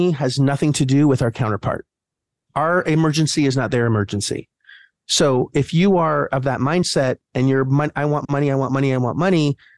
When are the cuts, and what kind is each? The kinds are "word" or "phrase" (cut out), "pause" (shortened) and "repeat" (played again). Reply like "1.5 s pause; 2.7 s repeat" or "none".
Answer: none

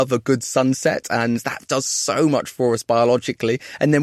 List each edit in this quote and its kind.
none

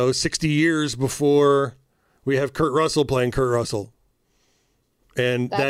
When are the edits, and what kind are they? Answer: none

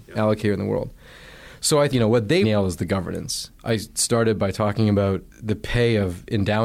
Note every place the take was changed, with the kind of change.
1.9 s word; 2.4 s word; 3.6 s pause; 5.3 s pause

